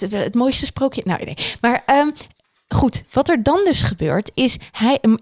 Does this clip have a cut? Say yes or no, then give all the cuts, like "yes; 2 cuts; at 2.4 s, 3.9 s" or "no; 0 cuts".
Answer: no; 0 cuts